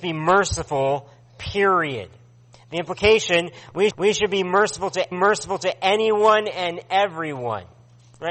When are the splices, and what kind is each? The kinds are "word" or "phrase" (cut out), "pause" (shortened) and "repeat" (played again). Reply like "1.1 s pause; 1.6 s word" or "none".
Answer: 3.9 s repeat; 5.1 s repeat